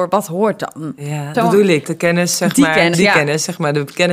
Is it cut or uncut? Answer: cut